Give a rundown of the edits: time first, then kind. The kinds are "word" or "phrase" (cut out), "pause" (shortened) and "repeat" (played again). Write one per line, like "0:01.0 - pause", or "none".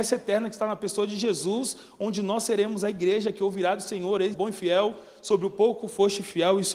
0:04.3 - word